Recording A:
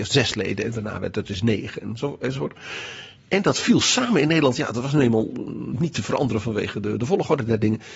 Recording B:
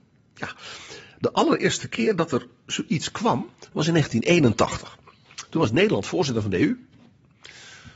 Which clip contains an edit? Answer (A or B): A